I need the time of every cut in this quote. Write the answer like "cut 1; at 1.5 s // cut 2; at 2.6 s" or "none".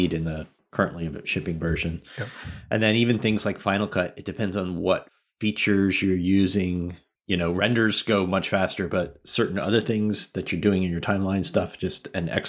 none

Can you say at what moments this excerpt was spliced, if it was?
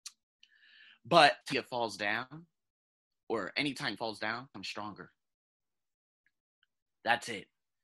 cut 1; at 1.4 s // cut 2; at 4.0 s // cut 3; at 4.5 s

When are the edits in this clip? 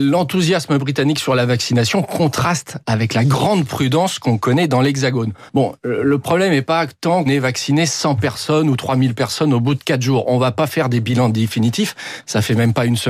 cut 1; at 5.5 s // cut 2; at 7.3 s

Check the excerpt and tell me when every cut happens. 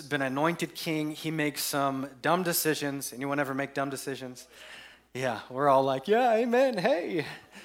none

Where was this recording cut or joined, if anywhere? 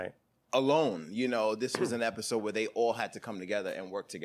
none

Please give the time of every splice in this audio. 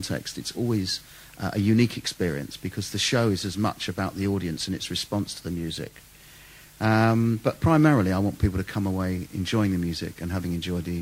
none

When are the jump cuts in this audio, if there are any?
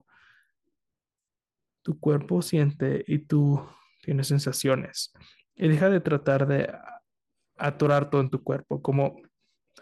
none

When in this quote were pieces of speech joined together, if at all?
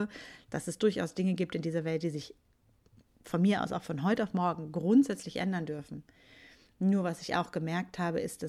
none

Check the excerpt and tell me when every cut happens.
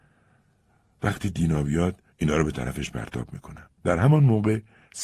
cut 1; at 2.1 s // cut 2; at 3.8 s

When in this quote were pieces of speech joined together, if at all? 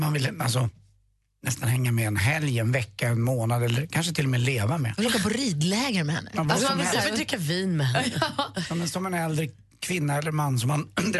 none

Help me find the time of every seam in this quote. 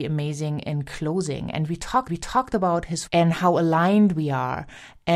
cut 1; at 2.1 s // cut 2; at 3.1 s

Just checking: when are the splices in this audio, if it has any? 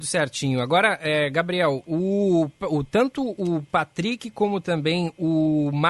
none

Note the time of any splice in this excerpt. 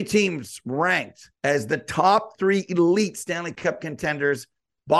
cut 1; at 1.4 s

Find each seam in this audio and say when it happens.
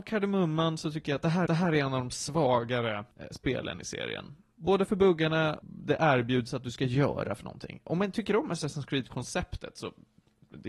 cut 1; at 1.5 s // cut 2; at 3.1 s // cut 3; at 5.6 s

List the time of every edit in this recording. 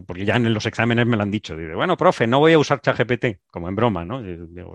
none

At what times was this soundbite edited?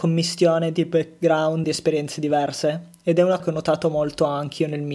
cut 1; at 1.6 s // cut 2; at 3.4 s

